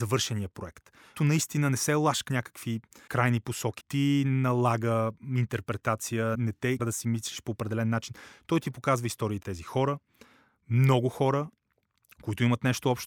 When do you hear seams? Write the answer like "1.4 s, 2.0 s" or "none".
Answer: 1.2 s, 2.3 s, 3.1 s, 3.8 s, 6.3 s, 6.8 s, 9.4 s